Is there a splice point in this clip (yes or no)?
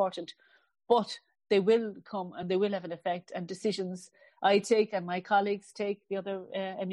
no